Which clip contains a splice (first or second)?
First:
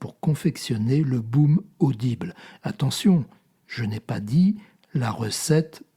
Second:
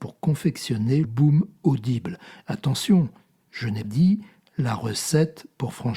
second